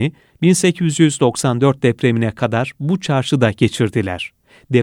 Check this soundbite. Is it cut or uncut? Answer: uncut